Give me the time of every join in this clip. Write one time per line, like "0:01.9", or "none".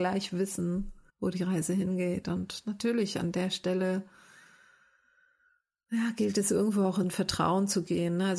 0:01.1
0:07.0